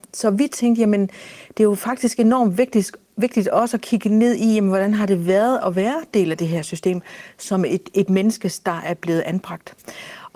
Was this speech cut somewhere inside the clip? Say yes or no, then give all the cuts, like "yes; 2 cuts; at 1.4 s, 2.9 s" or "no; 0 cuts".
no; 0 cuts